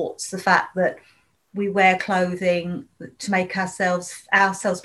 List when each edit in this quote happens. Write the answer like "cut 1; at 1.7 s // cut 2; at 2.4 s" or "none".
none